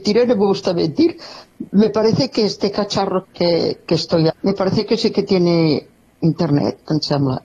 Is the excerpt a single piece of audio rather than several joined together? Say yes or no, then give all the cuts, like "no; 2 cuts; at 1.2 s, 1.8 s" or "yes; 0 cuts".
no; 2 cuts; at 3.2 s, 4.3 s